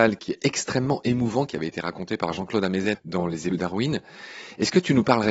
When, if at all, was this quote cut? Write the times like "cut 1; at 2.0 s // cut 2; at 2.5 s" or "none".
cut 1; at 2.9 s // cut 2; at 3.5 s